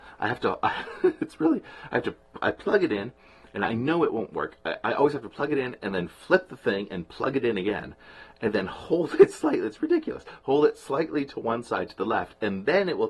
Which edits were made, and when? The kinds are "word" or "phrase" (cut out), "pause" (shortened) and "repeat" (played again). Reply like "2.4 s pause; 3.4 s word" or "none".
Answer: none